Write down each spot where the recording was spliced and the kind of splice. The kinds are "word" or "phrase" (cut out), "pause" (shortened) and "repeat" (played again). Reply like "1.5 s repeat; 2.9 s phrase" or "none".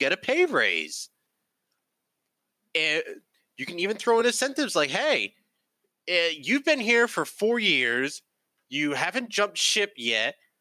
none